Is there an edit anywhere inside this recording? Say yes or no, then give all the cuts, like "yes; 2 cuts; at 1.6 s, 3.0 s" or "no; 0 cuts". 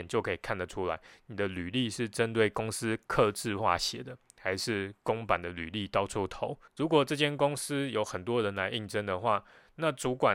yes; 1 cut; at 6.7 s